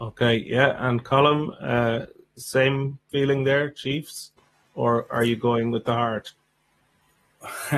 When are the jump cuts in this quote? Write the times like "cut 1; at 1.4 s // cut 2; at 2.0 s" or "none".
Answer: none